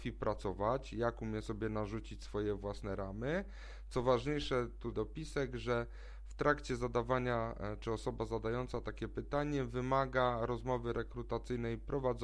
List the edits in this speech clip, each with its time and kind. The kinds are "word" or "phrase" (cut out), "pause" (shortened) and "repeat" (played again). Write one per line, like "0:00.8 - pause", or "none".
0:04.9 - phrase

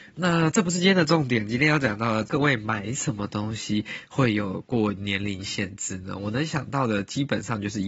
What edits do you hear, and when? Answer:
0:02.3 - phrase

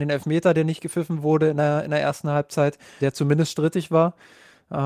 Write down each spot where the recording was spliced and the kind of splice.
0:03.0 - word

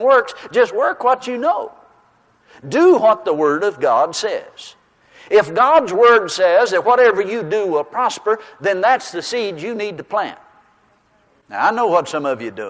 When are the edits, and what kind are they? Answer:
none

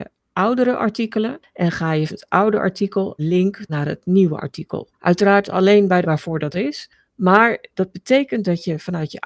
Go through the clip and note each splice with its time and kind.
0:02.1 - word
0:03.2 - word
0:03.7 - word
0:04.9 - pause
0:06.0 - word
0:06.5 - word

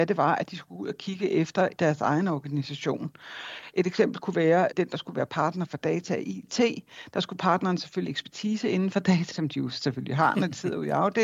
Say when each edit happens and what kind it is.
0:01.8 - word
0:04.7 - word
0:08.1 - word
0:09.3 - word

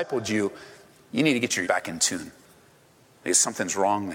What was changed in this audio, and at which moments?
0:01.6 - word

